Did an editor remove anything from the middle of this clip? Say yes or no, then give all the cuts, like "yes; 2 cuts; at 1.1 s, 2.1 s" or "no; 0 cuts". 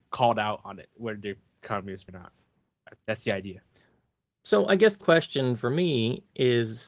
yes; 3 cuts; at 2.1 s, 3.0 s, 5.0 s